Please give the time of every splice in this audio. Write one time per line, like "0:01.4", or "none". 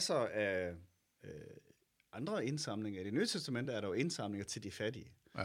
none

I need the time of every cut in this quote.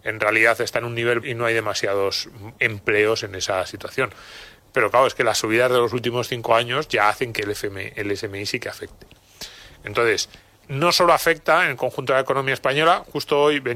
0:01.2
0:10.6

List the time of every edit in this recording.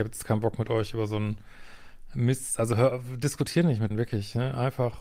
0:03.9

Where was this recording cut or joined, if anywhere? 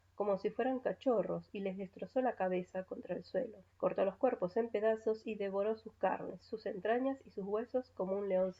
0:03.7

